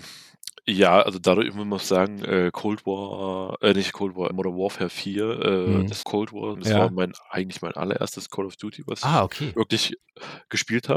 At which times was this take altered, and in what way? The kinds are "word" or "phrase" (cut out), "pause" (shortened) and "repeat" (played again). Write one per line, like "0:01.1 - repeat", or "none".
0:04.3 - word
0:06.0 - word
0:06.5 - word